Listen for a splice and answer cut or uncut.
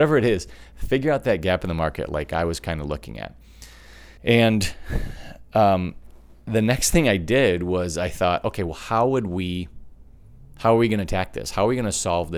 cut